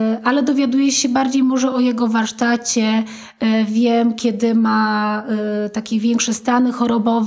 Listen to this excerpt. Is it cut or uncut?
uncut